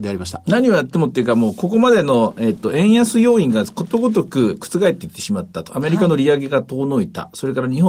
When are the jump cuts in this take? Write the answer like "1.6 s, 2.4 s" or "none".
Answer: none